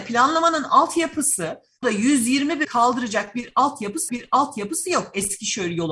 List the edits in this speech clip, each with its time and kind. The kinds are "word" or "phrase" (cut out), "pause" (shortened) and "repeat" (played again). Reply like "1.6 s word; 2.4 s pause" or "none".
1.8 s word; 2.6 s word; 4.1 s repeat